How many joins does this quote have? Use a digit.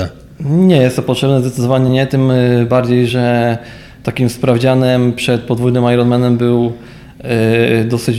0